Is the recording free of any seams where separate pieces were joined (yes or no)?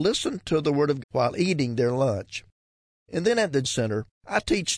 no